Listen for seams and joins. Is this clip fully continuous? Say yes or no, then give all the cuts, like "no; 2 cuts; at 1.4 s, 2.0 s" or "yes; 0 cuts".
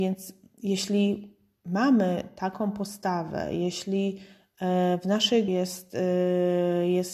no; 1 cut; at 5.5 s